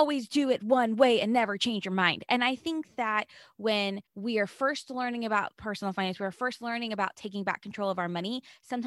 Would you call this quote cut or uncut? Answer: cut